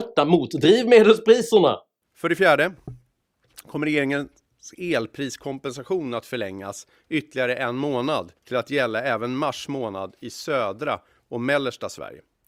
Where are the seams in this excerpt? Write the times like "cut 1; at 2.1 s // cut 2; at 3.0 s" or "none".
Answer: cut 1; at 8.4 s